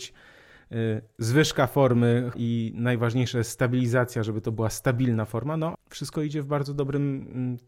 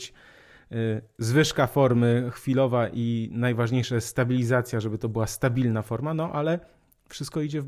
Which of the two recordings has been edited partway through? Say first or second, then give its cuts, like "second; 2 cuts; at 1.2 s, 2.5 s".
first; 2 cuts; at 2.3 s, 5.7 s